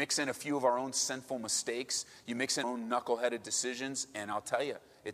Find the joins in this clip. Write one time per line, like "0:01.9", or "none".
0:02.6